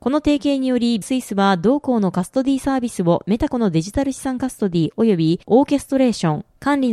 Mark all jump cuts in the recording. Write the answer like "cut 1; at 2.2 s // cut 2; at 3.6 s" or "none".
cut 1; at 1.0 s